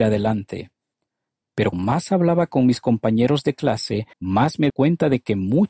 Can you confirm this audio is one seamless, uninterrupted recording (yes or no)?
no